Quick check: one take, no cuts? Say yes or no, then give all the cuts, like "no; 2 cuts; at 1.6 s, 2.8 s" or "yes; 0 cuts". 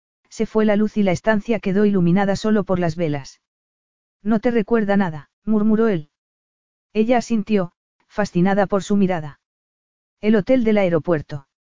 no; 1 cut; at 5.3 s